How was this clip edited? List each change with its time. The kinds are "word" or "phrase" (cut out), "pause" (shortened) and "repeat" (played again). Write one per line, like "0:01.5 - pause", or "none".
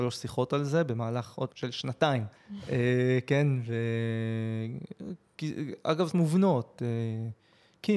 0:01.5 - word
0:02.3 - pause
0:06.1 - word